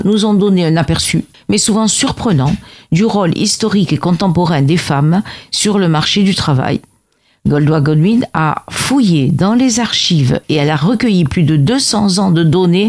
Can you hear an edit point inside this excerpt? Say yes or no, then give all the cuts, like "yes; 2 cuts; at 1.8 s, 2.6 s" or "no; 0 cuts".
yes; 1 cut; at 1.3 s